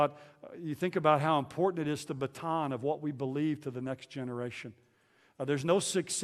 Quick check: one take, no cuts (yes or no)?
no